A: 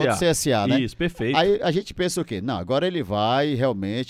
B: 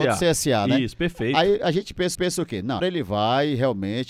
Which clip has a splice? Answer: B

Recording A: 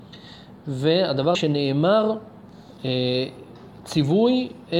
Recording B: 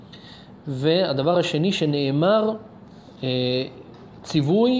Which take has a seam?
A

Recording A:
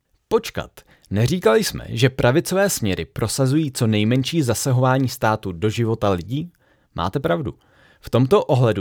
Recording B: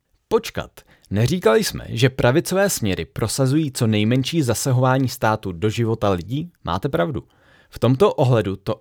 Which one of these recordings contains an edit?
B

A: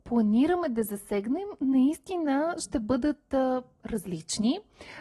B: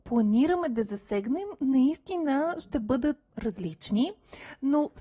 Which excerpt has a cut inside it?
B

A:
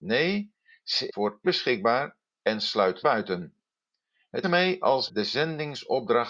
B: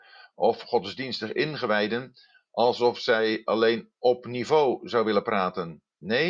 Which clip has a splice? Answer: A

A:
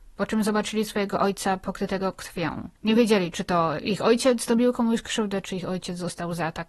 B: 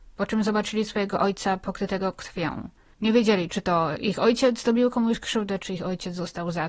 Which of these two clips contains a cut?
A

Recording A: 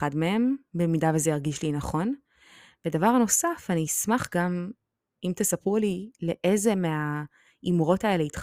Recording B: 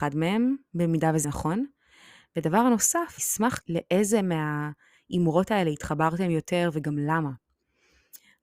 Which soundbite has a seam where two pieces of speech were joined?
B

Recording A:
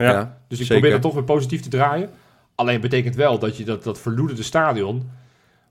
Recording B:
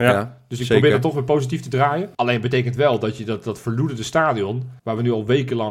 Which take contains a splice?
B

